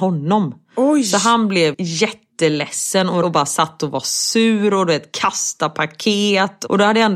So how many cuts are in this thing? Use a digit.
2